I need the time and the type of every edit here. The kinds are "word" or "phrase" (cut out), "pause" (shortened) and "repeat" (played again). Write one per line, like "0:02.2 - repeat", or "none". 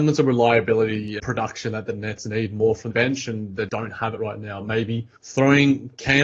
0:01.2 - word
0:02.9 - word
0:03.7 - word
0:05.2 - pause